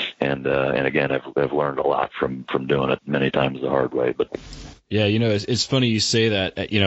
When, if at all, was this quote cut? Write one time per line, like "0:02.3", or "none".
none